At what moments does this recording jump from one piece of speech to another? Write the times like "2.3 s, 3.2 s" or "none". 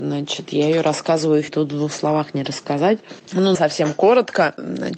1.5 s, 3.5 s